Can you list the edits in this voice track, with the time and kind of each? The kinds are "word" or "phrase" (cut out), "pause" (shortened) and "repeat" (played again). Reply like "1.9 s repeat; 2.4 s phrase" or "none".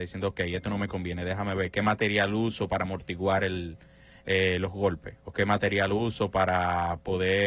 none